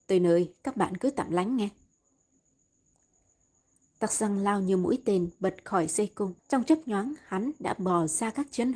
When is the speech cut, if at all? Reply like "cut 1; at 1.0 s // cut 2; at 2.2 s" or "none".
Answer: cut 1; at 6.4 s